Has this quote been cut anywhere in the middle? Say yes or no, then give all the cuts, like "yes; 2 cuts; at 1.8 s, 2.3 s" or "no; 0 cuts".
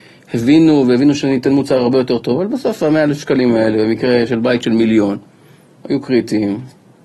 no; 0 cuts